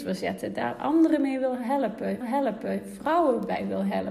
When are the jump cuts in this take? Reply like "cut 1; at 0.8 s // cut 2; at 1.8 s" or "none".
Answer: cut 1; at 2.2 s